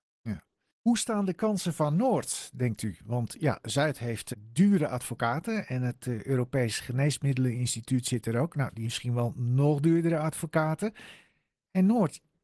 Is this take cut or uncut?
cut